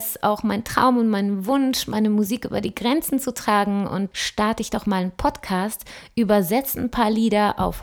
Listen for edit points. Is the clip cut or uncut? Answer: cut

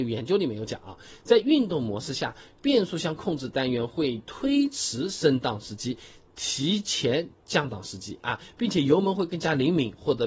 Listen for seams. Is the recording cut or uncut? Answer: uncut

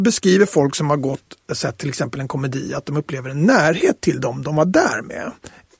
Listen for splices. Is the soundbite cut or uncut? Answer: uncut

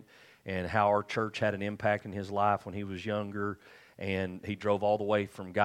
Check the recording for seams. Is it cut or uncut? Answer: uncut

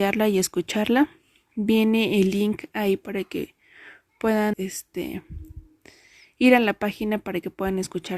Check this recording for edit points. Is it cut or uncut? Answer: cut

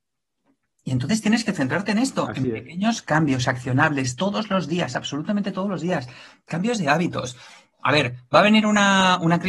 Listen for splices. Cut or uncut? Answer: uncut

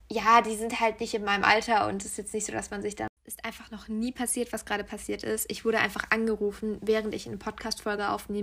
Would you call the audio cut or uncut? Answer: cut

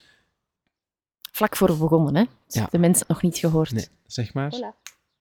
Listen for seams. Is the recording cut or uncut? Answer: cut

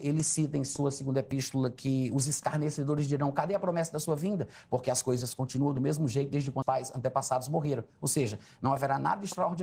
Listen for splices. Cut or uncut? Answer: cut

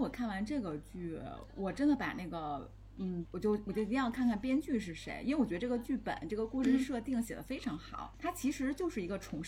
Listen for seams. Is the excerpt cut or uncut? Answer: cut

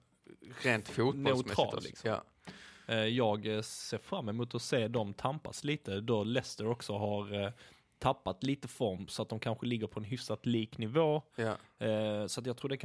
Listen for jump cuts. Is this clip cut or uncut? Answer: uncut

